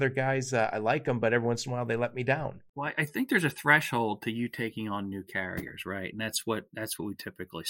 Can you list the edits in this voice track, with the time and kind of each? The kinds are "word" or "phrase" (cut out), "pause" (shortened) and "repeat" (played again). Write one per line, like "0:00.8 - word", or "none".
none

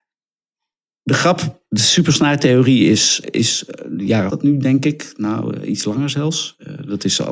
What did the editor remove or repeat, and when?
0:03.2 - word
0:04.3 - phrase

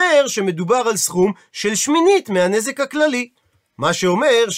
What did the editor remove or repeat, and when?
none

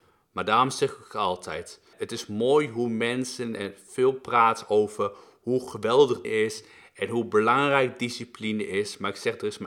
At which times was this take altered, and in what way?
0:01.9 - word
0:06.2 - word

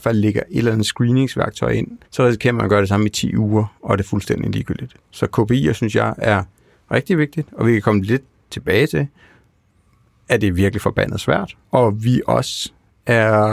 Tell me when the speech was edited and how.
0:02.0 - pause
0:11.6 - pause

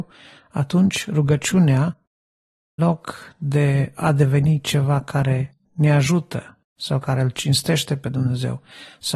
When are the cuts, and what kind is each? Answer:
0:02.8 - word

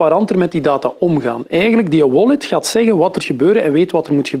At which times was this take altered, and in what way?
0:03.2 - word

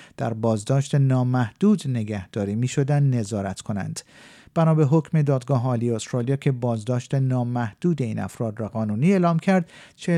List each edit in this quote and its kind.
0:08.7 - word

